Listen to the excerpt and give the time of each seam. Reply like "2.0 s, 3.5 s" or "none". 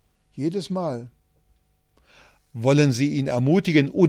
none